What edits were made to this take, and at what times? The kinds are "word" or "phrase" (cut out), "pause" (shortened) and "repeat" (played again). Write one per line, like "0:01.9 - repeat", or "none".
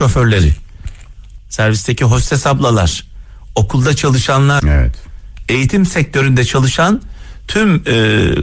0:01.4 - word
0:04.6 - word